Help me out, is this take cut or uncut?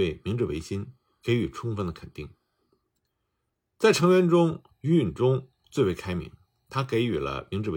uncut